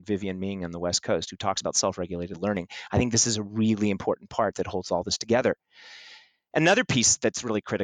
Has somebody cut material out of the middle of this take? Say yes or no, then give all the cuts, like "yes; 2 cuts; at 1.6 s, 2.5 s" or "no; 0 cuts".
no; 0 cuts